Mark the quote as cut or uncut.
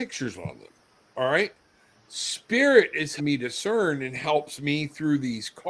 cut